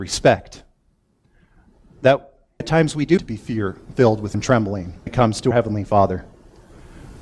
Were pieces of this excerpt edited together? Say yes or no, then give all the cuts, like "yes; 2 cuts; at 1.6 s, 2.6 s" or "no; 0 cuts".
yes; 5 cuts; at 2.6 s, 3.2 s, 4.3 s, 5.1 s, 5.5 s